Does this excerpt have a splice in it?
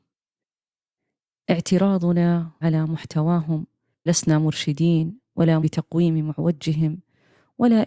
yes; 3 cuts; at 2.6 s, 4.1 s, 5.6 s

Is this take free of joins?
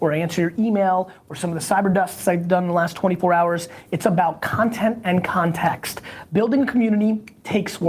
yes; 0 cuts

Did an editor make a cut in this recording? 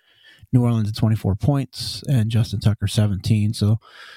yes; 1 cut; at 0.9 s

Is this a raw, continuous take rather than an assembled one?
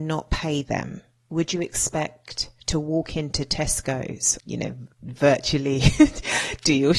no; 3 cuts; at 2.6 s, 4.4 s, 4.9 s

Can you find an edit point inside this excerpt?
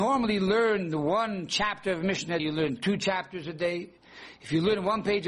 yes; 1 cut; at 2.4 s

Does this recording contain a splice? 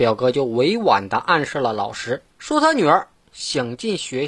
yes; 1 cut; at 2.3 s

